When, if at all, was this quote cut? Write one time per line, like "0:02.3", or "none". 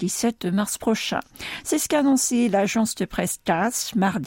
none